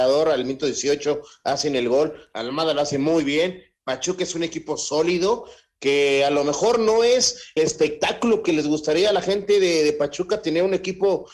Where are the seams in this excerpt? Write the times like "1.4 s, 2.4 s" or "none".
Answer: 7.6 s